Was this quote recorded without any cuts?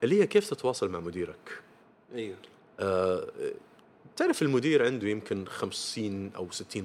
yes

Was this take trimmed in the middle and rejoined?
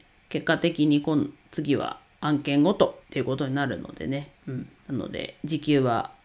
yes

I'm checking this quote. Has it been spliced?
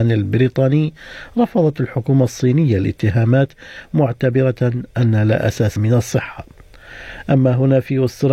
yes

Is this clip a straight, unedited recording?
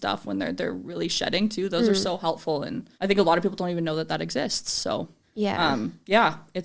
no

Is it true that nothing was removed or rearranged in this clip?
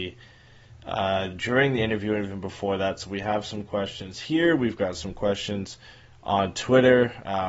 yes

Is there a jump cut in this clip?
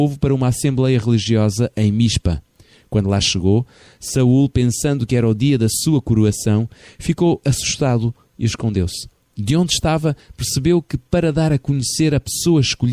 no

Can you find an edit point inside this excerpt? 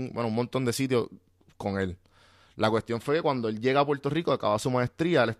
no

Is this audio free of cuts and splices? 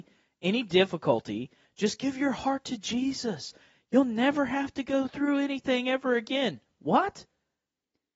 yes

